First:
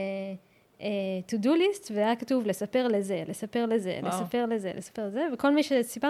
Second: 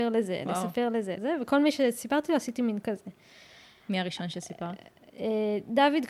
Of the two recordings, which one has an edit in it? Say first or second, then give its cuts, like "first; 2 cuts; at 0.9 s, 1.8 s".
second; 2 cuts; at 1.2 s, 2.8 s